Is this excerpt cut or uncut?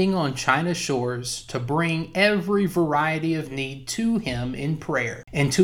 uncut